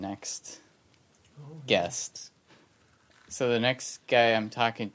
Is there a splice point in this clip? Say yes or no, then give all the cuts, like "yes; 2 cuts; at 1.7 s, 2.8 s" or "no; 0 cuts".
no; 0 cuts